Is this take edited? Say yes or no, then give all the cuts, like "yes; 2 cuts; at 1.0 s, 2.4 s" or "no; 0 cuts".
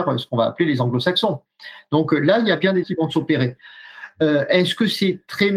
yes; 1 cut; at 2.8 s